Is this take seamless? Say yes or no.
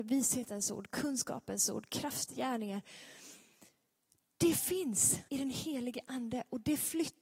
no